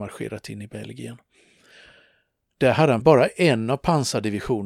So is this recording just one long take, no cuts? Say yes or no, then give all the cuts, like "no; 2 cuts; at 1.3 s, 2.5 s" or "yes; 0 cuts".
no; 1 cut; at 3.0 s